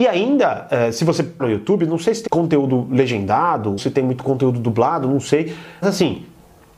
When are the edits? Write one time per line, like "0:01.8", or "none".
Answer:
0:01.4
0:02.3
0:03.8
0:05.8